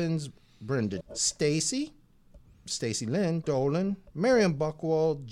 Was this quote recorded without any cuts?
no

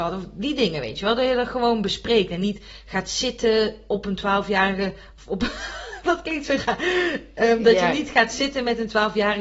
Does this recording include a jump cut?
no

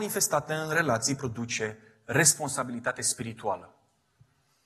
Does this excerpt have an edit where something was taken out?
no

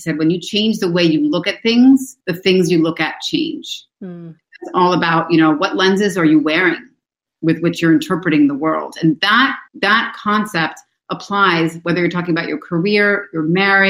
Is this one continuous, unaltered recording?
no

